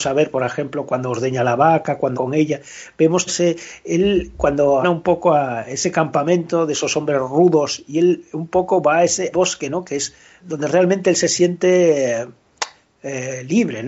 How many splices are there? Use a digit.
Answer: 5